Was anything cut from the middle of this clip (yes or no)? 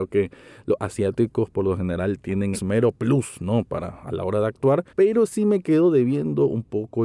yes